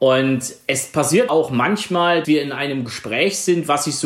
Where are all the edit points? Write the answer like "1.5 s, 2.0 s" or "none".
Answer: 1.3 s, 2.2 s